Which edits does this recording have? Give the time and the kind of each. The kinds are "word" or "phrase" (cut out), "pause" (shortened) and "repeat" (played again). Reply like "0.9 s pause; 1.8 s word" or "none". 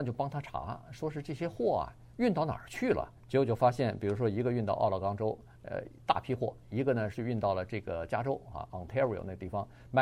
3.2 s pause